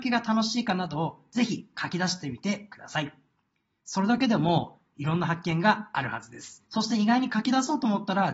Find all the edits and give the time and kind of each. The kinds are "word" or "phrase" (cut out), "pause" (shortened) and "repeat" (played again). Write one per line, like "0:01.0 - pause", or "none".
0:06.7 - pause